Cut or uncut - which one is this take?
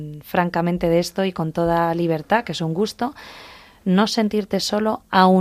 uncut